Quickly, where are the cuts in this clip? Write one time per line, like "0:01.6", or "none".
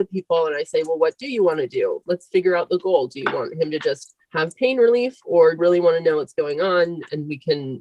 0:02.0
0:04.2
0:05.6